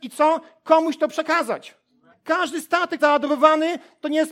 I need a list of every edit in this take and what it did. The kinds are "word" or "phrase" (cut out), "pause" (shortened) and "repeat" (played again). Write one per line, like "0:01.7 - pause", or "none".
0:02.1 - pause
0:03.0 - phrase